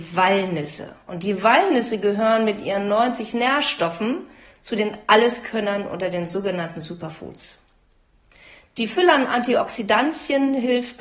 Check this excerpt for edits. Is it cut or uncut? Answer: uncut